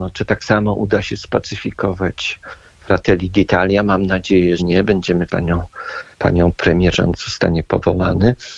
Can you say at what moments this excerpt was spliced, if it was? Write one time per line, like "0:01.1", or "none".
0:02.6
0:04.6
0:05.3
0:06.1
0:06.9